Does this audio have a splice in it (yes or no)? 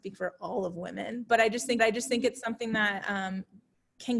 yes